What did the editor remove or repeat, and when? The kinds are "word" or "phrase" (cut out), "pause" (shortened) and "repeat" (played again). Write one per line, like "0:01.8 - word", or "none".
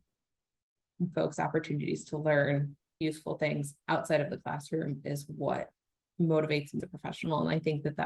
0:01.1 - word
0:03.0 - word
0:06.8 - word